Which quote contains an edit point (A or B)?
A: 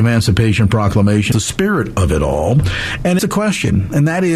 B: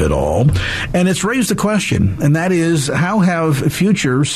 A